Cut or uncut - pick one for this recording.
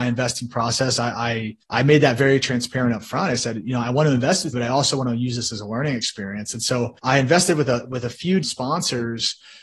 cut